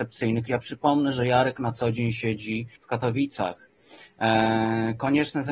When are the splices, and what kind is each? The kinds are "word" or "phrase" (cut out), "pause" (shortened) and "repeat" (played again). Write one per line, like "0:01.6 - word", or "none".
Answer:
0:02.8 - pause